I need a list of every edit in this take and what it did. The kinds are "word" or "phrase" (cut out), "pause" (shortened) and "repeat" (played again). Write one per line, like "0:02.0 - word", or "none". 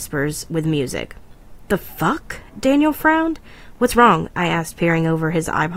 none